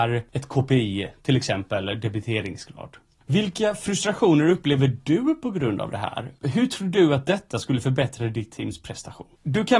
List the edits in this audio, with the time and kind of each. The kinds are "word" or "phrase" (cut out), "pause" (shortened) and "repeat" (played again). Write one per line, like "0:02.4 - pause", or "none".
none